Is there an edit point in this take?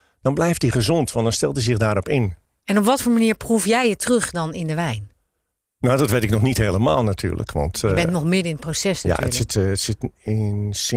no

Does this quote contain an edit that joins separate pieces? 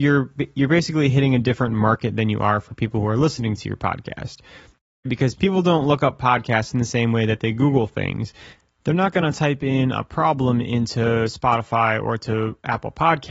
no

